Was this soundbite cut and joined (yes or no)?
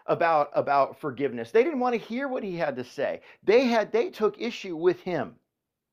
no